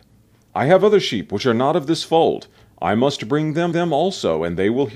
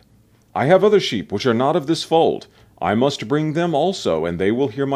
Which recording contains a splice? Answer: first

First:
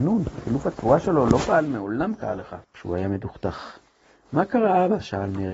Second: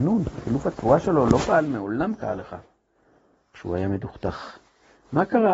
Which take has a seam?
first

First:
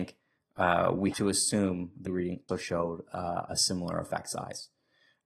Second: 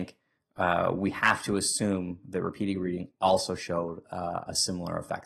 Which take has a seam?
first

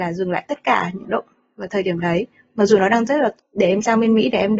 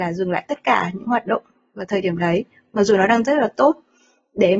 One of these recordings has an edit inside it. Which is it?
first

